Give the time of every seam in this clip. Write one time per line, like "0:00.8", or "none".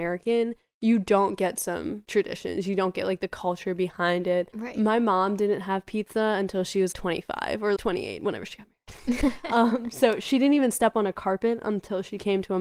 0:06.9
0:07.8